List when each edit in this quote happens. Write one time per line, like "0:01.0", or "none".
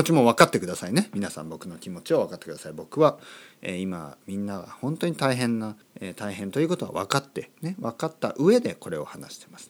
0:05.8